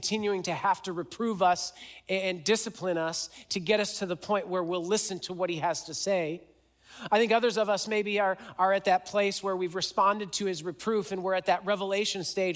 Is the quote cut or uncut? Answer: uncut